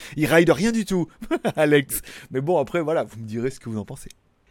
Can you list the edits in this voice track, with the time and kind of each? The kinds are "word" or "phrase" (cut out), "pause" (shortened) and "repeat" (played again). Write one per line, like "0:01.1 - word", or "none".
none